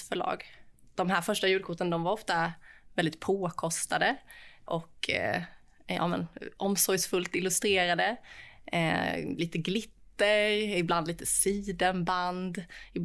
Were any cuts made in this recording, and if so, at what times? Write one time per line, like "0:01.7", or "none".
0:04.7